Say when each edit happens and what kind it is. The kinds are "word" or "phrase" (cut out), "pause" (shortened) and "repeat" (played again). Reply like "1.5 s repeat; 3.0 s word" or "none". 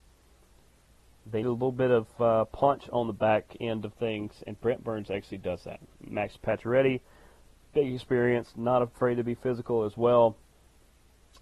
1.4 s word